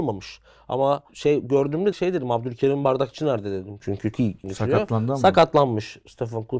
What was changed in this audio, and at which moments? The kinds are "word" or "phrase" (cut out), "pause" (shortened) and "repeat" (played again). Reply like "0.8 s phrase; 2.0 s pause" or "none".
1.9 s word; 4.1 s word; 4.4 s word